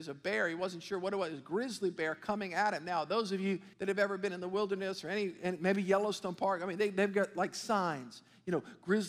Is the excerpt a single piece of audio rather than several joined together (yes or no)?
no